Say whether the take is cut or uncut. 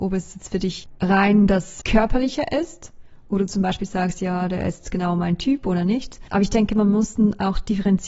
uncut